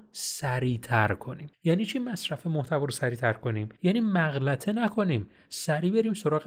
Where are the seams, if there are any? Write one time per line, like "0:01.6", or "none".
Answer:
0:01.5
0:03.8